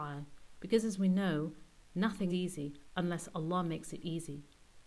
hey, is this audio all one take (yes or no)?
no